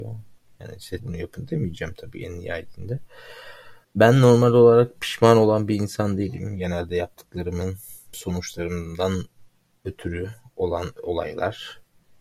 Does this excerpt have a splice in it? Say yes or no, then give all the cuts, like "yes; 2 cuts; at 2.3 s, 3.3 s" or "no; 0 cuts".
yes; 3 cuts; at 1.0 s, 3.8 s, 8.1 s